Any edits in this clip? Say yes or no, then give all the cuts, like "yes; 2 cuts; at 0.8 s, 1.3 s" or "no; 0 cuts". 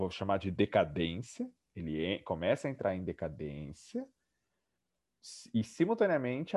no; 0 cuts